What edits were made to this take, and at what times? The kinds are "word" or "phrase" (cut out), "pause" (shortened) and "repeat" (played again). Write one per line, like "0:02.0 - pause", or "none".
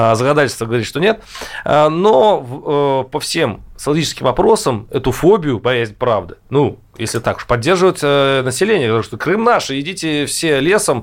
none